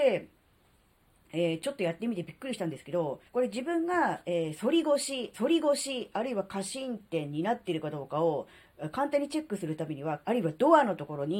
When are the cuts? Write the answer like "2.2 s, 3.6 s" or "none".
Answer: 3.3 s, 5.3 s, 10.2 s